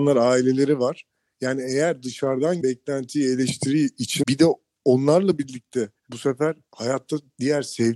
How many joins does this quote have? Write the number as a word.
three